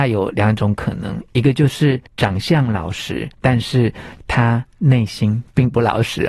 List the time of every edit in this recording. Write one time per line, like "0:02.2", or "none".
0:02.1
0:03.3